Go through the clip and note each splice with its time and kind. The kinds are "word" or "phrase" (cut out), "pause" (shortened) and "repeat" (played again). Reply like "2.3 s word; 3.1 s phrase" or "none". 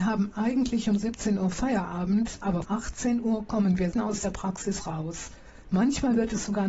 2.6 s word; 3.9 s word